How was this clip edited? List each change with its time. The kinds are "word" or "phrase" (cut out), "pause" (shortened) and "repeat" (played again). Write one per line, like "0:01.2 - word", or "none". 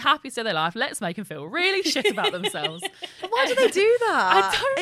none